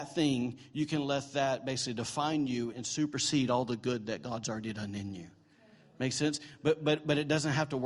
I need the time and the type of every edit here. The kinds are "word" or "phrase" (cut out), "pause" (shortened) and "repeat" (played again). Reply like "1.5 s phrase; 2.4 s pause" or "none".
2.7 s word